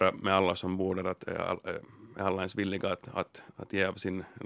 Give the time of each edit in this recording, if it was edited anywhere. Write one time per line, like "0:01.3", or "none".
0:03.5